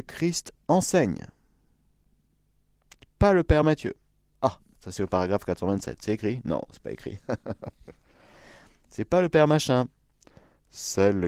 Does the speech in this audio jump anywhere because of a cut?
no; 0 cuts

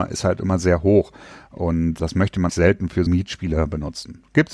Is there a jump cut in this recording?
yes; 3 cuts; at 2.0 s, 2.5 s, 3.1 s

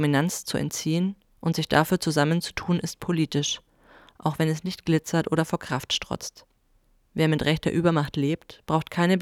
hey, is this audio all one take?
yes; 0 cuts

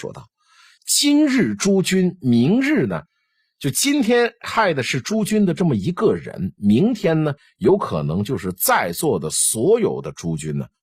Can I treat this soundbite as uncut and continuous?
yes; 0 cuts

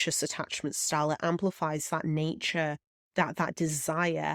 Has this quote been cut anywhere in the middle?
no; 0 cuts

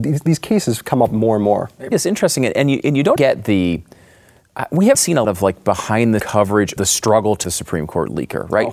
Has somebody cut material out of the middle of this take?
yes; 7 cuts; at 1.9 s, 3.2 s, 4.9 s, 5.2 s, 6.2 s, 6.8 s, 7.4 s

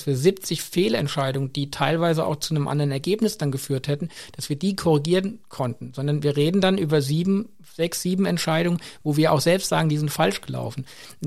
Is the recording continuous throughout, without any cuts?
yes; 0 cuts

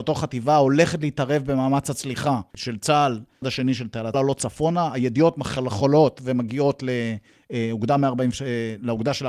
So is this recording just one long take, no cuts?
no; 2 cuts; at 3.4 s, 4.1 s

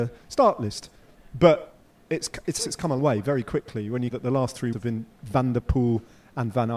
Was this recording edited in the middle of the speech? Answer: yes; 5 cuts; at 2.6 s, 3.0 s, 4.1 s, 4.7 s, 5.2 s

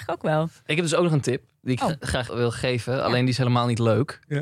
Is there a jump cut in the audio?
yes; 1 cut; at 2.3 s

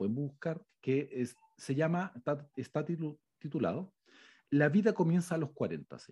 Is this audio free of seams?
yes; 0 cuts

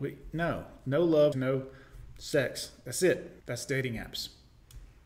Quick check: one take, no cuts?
no; 2 cuts; at 1.3 s, 3.4 s

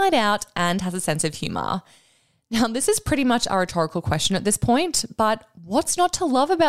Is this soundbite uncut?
yes; 0 cuts

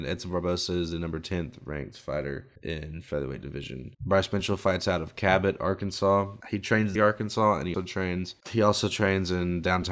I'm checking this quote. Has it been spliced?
yes; 6 cuts; at 2.6 s, 3.9 s, 6.4 s, 7.0 s, 7.7 s, 8.4 s

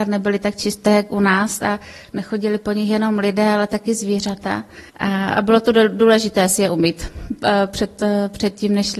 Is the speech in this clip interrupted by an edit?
yes; 1 cut; at 4.9 s

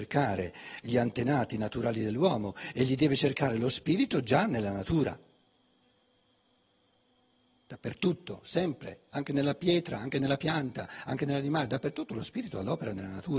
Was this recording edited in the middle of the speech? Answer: no; 0 cuts

